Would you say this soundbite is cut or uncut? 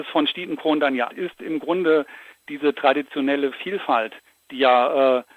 cut